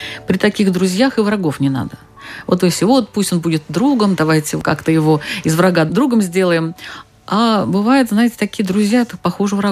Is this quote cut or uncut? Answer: uncut